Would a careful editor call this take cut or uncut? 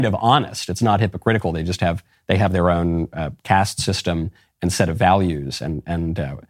uncut